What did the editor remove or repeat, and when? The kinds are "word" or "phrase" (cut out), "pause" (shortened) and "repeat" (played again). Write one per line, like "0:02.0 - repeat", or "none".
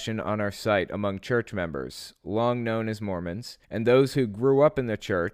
0:03.6 - pause